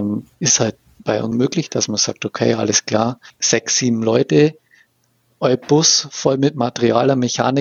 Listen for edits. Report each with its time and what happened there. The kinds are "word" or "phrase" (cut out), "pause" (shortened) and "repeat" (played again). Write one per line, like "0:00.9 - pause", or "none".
0:01.3 - word
0:03.3 - word